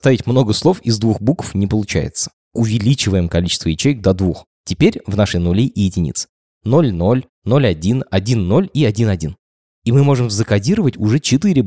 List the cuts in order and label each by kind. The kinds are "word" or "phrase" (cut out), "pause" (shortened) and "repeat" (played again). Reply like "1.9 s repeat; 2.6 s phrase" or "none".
2.3 s pause; 4.5 s pause; 5.3 s phrase